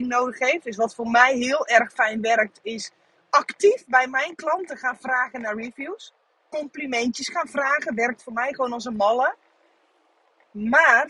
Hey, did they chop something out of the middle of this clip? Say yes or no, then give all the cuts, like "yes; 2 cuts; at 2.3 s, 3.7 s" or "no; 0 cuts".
no; 0 cuts